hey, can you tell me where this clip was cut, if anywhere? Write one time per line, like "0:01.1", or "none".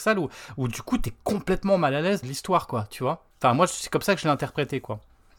0:02.2
0:03.3